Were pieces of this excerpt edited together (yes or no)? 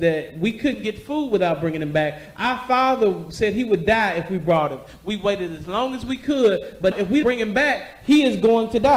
yes